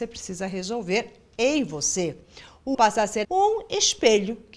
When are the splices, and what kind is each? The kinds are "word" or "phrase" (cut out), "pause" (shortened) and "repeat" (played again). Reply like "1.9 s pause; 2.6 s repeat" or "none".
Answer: 2.7 s word; 3.2 s word